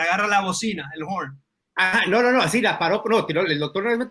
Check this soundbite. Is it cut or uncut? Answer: uncut